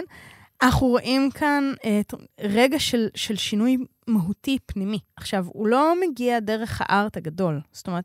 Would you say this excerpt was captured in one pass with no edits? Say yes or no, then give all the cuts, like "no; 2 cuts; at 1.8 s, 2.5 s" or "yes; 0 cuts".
yes; 0 cuts